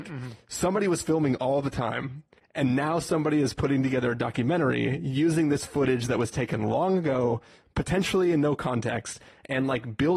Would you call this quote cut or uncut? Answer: uncut